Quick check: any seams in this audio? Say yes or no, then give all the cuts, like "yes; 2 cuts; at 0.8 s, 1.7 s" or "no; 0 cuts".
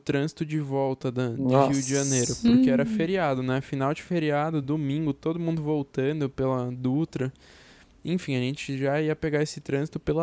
no; 0 cuts